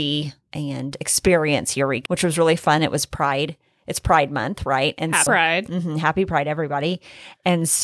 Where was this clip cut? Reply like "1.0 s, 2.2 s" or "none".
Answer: 2.1 s, 5.3 s